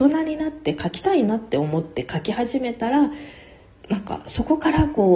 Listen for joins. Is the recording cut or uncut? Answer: uncut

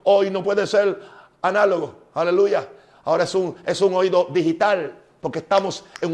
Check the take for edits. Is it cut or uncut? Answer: uncut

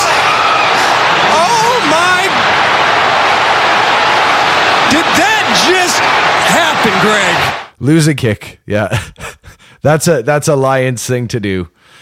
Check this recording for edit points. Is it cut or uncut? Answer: cut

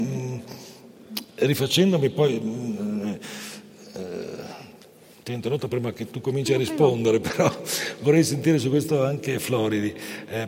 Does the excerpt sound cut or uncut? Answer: uncut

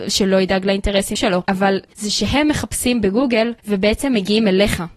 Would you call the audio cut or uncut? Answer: cut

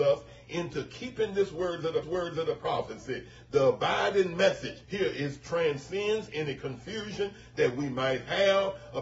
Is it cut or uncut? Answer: cut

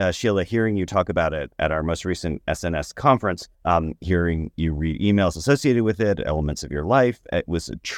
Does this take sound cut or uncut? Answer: cut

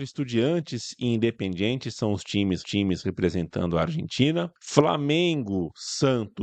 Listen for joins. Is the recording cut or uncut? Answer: cut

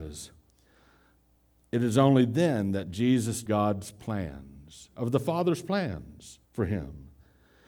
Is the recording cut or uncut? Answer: cut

